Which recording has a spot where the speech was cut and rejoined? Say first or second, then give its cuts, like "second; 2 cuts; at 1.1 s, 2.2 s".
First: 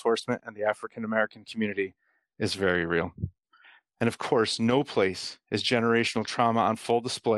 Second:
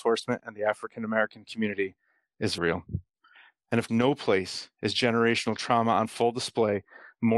second; 2 cuts; at 2.6 s, 3.9 s